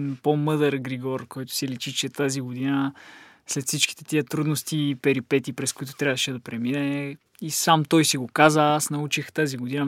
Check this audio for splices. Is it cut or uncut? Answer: uncut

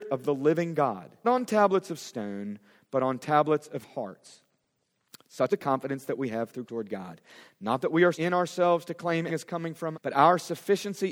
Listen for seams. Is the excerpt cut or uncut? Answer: cut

